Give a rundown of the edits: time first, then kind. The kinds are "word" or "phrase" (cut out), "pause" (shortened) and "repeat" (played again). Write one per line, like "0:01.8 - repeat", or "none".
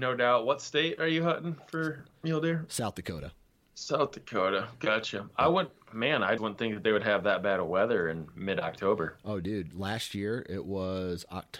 0:06.4 - word

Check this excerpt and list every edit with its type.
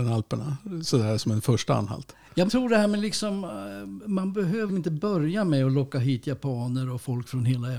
0:02.5 - word
0:04.7 - word

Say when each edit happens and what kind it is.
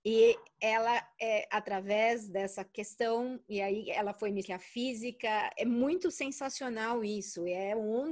0:04.4 - word
0:05.5 - word

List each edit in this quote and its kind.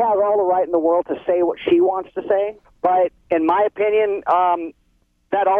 0:02.6 - pause

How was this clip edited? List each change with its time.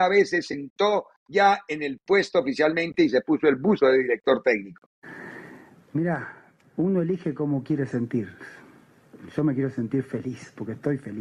none

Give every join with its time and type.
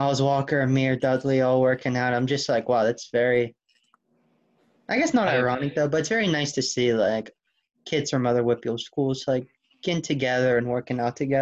none

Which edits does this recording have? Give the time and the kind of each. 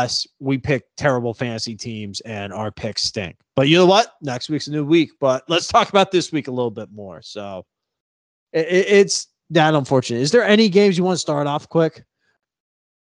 none

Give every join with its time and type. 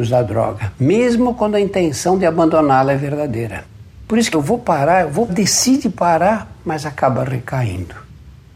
0:04.3 - phrase
0:05.3 - word

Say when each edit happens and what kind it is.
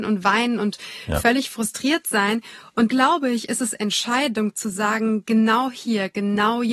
0:02.9 - word

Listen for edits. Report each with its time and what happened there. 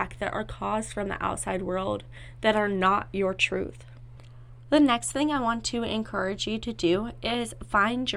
none

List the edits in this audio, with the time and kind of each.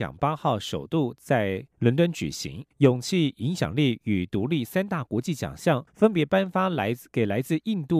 0:01.7 - pause
0:02.7 - pause
0:05.9 - pause

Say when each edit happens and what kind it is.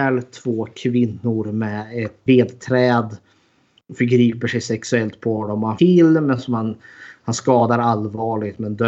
0:02.3 - word
0:05.8 - phrase

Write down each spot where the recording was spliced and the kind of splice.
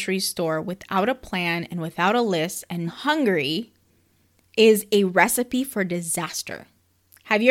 0:02.9 - word

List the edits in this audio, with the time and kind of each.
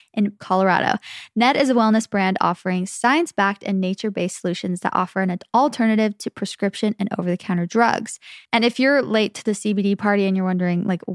0:08.5 - pause

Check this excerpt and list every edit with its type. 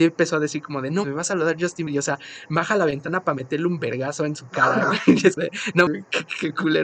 0:01.0 - word
0:01.9 - word
0:05.4 - word
0:05.9 - word

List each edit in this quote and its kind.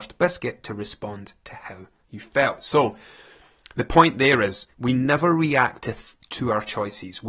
0:04.7 - pause

